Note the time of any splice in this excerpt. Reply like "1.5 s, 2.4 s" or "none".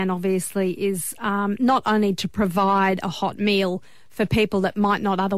none